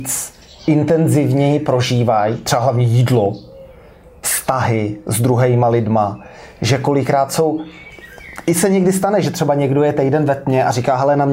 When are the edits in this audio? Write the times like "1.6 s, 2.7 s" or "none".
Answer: none